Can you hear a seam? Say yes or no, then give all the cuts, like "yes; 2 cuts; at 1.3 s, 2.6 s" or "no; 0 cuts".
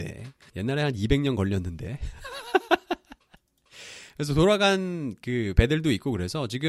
no; 0 cuts